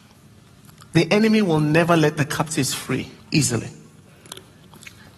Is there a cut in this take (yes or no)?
yes